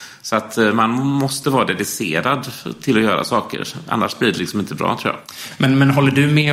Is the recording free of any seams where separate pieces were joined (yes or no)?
yes